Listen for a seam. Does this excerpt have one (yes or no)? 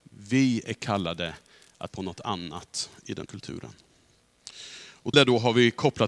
yes